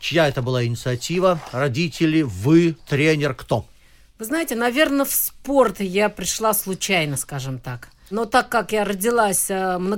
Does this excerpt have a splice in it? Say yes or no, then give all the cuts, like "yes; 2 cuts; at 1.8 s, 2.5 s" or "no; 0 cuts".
no; 0 cuts